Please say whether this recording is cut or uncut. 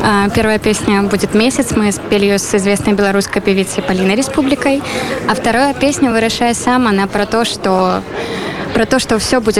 uncut